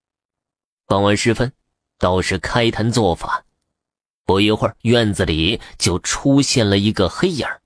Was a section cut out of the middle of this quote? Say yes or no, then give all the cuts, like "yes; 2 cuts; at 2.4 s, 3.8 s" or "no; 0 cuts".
yes; 1 cut; at 4.8 s